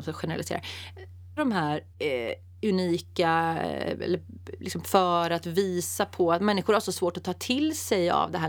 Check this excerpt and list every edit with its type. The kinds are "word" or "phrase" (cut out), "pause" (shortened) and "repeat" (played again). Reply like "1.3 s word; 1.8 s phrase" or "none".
1.4 s word; 1.9 s pause; 4.8 s phrase